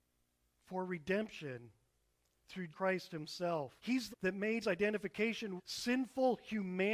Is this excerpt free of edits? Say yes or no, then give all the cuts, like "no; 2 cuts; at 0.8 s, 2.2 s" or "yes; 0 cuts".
no; 5 cuts; at 2.7 s, 3.8 s, 4.1 s, 4.6 s, 5.6 s